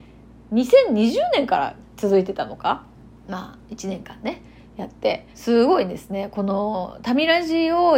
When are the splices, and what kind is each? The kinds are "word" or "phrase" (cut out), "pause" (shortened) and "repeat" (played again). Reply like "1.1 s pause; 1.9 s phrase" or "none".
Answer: 3.0 s pause; 5.3 s pause